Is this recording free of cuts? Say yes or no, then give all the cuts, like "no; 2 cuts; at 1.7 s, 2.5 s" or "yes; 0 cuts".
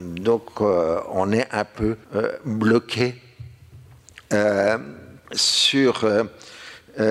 no; 2 cuts; at 2.0 s, 5.2 s